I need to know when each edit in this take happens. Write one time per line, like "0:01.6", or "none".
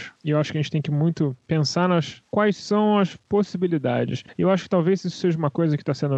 0:01.4